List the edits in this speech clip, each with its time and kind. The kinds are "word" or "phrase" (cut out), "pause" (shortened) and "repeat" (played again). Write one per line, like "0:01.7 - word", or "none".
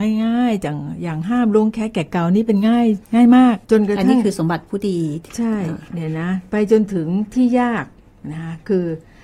0:03.1 - pause
0:03.6 - pause